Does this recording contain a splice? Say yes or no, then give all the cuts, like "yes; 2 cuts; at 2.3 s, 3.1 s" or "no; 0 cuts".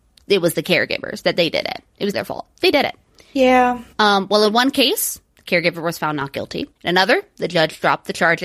yes; 4 cuts; at 2.1 s, 2.7 s, 3.9 s, 6.8 s